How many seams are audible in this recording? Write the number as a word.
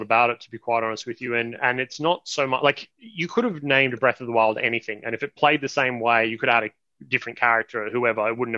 zero